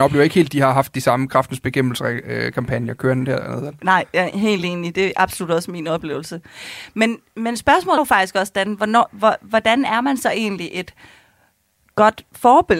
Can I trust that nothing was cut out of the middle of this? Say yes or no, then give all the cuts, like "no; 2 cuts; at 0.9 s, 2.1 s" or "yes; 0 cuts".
no; 2 cuts; at 4.1 s, 8.0 s